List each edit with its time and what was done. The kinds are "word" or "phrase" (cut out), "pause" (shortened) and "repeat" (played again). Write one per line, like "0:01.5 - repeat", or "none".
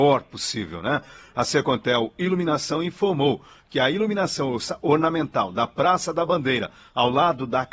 none